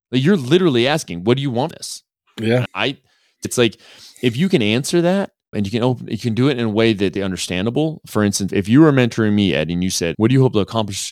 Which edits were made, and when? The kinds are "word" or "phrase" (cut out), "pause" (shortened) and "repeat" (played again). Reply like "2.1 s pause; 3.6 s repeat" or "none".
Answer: 1.7 s word; 2.7 s word; 3.4 s word; 5.5 s word; 7.2 s word; 8.5 s word; 10.1 s word